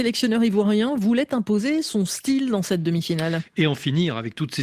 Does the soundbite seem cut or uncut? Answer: uncut